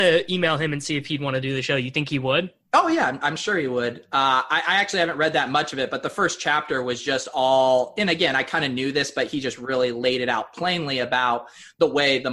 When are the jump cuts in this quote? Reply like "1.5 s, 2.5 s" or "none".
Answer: none